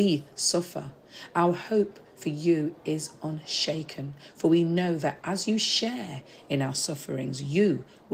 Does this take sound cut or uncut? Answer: uncut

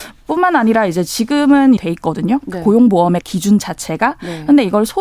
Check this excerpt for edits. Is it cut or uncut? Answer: cut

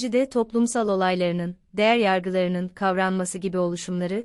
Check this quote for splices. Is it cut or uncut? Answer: uncut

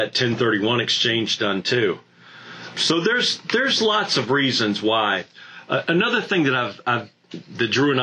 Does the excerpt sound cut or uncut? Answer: cut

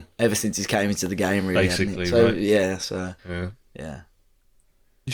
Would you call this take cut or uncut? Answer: cut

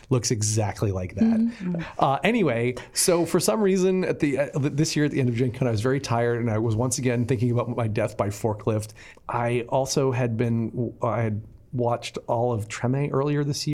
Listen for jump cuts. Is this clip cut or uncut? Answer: uncut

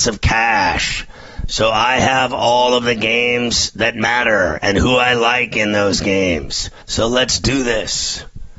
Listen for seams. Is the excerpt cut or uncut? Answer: cut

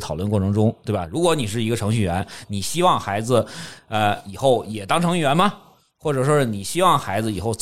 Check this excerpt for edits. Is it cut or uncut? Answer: uncut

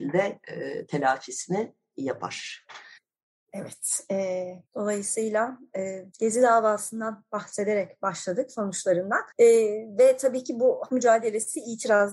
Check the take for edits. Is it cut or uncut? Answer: cut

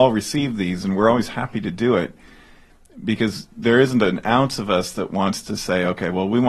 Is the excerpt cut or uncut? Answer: uncut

